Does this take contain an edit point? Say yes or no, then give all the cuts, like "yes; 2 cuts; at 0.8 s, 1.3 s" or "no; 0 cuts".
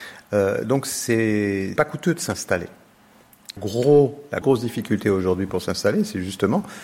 yes; 3 cuts; at 1.8 s, 3.6 s, 4.4 s